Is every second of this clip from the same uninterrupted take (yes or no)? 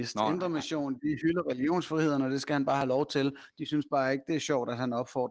yes